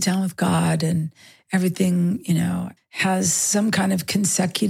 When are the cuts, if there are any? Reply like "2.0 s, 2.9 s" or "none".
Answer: 2.8 s